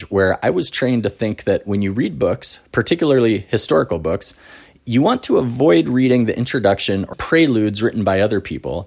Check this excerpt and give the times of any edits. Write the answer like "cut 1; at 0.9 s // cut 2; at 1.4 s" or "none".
cut 1; at 7.1 s